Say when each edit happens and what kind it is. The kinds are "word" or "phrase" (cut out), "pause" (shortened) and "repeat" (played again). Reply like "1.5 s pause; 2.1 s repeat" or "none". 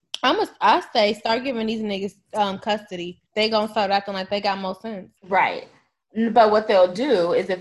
3.3 s pause; 5.2 s pause